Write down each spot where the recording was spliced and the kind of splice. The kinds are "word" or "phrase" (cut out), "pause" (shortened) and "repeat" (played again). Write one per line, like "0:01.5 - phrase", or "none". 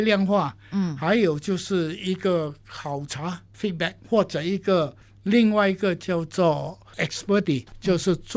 none